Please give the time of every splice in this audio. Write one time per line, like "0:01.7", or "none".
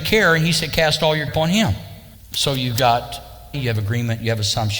0:01.3
0:03.5